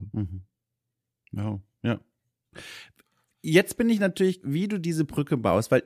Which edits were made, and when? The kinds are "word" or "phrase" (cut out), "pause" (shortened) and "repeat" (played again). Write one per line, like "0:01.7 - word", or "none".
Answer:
0:04.4 - word